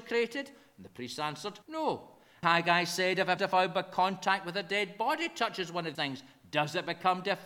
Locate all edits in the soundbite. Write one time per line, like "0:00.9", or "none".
0:01.6
0:02.4
0:03.4
0:05.9